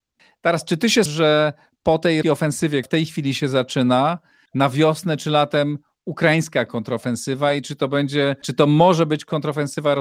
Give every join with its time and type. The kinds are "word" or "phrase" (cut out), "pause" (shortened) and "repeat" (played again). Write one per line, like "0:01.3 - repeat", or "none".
0:01.1 - word
0:02.2 - word
0:02.8 - word
0:04.5 - word
0:08.4 - word